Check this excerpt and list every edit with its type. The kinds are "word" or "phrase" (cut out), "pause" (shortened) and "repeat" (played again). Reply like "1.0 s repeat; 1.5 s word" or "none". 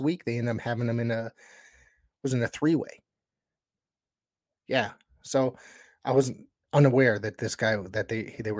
none